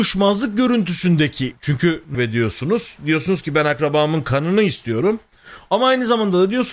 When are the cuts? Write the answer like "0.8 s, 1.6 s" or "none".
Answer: 1.5 s, 2.1 s